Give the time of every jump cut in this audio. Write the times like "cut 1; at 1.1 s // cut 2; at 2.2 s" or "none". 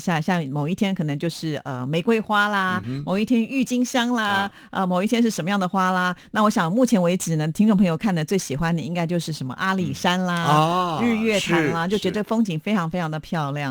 none